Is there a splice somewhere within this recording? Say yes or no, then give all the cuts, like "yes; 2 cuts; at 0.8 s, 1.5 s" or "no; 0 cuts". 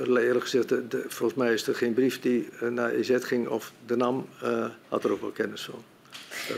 yes; 1 cut; at 4.8 s